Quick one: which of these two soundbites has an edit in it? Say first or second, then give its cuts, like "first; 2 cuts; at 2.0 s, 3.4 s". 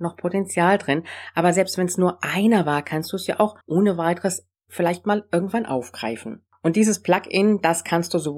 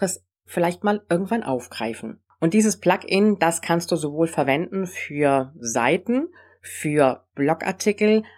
first; 1 cut; at 3.6 s